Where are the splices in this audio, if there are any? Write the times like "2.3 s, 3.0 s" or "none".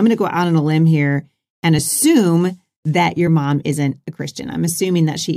none